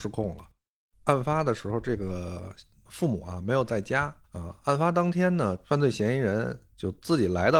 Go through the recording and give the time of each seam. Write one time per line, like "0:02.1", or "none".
0:04.3